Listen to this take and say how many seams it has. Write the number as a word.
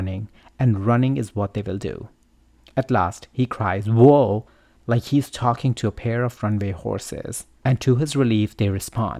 one